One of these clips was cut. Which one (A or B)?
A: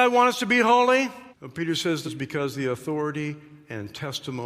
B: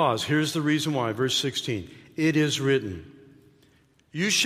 A